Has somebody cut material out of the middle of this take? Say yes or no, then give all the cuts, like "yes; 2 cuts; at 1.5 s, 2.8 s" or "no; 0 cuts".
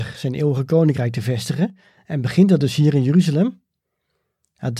no; 0 cuts